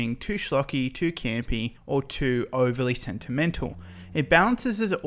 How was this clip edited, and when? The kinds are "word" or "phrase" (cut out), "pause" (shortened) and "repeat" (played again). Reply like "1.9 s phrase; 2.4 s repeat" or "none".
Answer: 1.8 s pause